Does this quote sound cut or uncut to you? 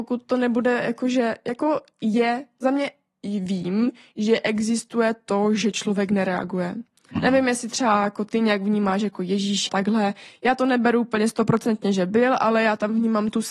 cut